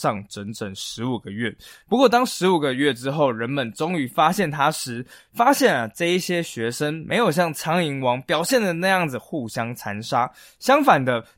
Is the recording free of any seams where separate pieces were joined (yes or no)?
yes